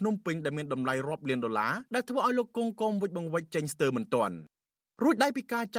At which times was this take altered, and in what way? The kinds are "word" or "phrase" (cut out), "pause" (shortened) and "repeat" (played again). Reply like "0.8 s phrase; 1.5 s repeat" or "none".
1.9 s pause